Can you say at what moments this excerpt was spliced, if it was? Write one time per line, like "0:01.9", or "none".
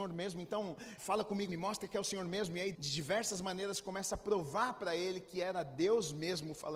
0:01.0
0:01.5
0:02.7